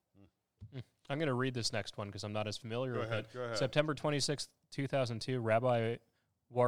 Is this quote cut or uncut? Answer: uncut